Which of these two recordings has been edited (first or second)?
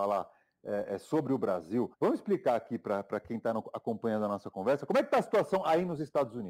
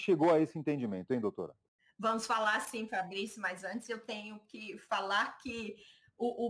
first